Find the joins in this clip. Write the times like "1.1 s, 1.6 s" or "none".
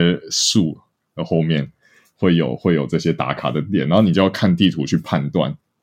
none